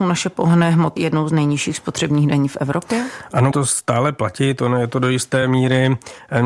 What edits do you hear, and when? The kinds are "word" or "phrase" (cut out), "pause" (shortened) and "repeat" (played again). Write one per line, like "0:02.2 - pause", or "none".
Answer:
0:01.0 - word
0:03.5 - word